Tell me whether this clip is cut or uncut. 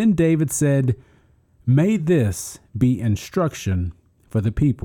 uncut